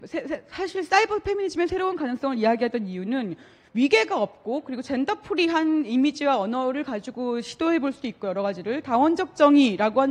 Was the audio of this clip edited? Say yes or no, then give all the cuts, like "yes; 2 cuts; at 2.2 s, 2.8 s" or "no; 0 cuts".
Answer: no; 0 cuts